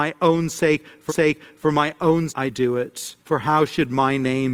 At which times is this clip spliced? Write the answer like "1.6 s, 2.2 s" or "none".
1.1 s, 2.3 s, 3.2 s